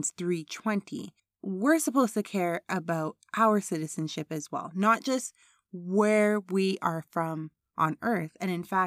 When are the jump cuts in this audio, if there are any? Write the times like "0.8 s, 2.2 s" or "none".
1.2 s